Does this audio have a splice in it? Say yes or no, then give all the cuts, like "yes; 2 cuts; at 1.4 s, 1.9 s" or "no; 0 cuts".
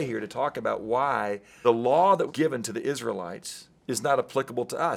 yes; 3 cuts; at 1.6 s, 2.3 s, 3.8 s